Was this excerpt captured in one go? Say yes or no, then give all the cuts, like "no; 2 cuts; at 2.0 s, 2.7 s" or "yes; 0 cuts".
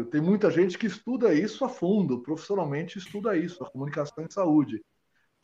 yes; 0 cuts